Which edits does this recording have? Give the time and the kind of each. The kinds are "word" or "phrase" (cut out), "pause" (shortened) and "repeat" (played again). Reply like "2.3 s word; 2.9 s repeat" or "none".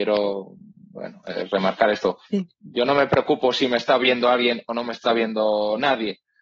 2.3 s pause